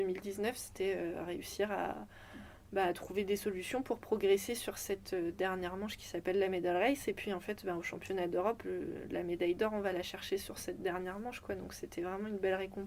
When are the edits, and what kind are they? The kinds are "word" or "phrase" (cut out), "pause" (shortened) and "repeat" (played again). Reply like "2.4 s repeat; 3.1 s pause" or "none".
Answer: 8.6 s word